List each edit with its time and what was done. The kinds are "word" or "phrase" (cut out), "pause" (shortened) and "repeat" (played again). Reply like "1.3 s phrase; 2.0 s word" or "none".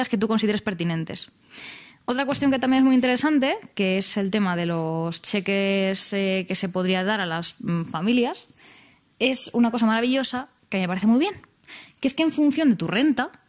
none

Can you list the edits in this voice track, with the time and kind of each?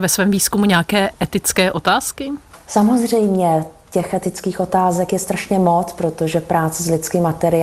none

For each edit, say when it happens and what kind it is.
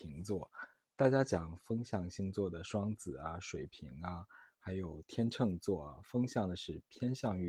none

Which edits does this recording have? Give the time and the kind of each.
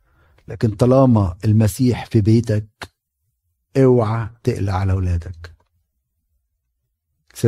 none

